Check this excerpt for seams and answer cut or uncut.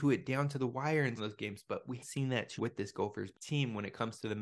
cut